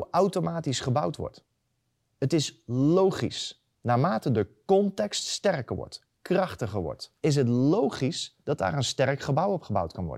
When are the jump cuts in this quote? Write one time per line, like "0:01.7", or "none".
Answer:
0:03.7
0:07.2
0:08.4